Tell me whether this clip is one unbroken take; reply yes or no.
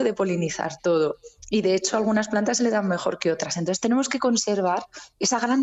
yes